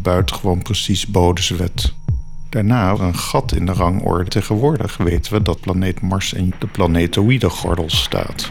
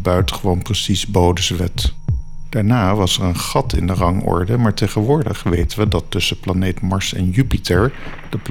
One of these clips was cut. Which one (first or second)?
first